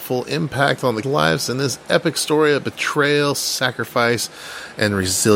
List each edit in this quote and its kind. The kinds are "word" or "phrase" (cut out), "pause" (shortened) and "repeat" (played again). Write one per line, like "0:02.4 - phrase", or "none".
0:01.0 - word